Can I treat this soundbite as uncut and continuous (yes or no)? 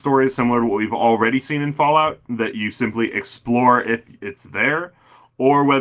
yes